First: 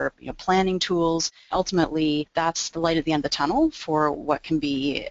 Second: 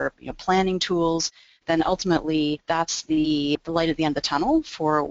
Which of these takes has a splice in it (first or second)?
first